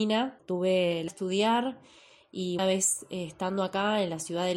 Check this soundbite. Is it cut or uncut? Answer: cut